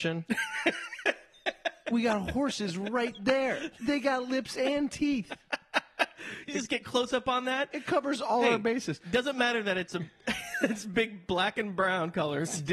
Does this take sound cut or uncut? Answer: uncut